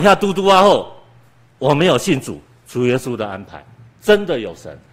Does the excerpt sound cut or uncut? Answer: uncut